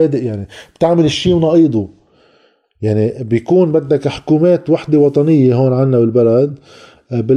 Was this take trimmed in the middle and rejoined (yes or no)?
no